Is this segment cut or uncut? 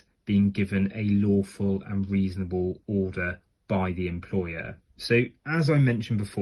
cut